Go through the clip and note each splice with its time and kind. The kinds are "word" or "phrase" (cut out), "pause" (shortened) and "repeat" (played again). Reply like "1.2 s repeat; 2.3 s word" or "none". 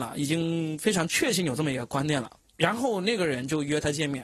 2.4 s pause